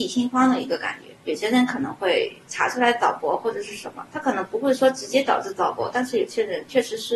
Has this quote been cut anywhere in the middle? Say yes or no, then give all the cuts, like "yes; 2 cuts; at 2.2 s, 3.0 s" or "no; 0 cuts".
yes; 1 cut; at 1.2 s